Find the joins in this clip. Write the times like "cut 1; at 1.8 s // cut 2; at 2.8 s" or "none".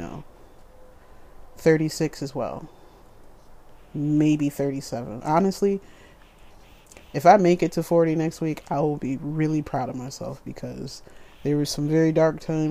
none